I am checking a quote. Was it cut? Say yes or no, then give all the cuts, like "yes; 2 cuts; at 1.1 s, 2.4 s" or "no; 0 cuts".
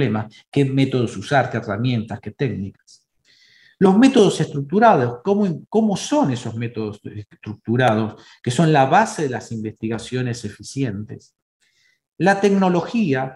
no; 0 cuts